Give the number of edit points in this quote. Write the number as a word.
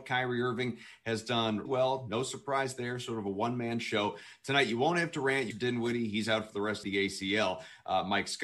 three